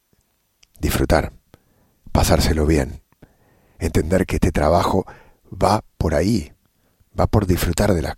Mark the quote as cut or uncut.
uncut